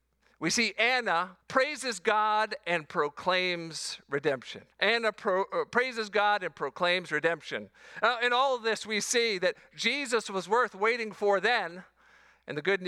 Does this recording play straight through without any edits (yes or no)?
no